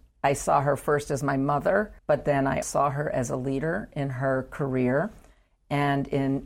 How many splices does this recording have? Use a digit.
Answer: 2